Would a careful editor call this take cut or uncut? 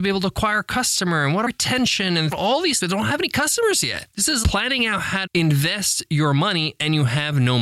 cut